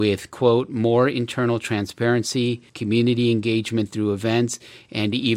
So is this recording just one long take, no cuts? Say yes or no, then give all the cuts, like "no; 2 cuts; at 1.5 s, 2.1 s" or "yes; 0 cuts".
no; 1 cut; at 2.7 s